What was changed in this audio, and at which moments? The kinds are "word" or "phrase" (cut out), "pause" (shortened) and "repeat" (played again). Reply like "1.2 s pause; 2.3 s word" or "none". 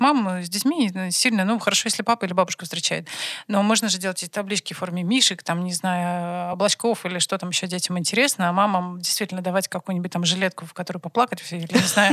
none